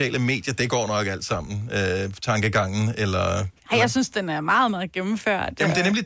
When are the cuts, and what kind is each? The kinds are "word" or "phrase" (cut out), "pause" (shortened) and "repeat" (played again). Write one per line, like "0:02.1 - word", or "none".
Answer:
0:03.6 - pause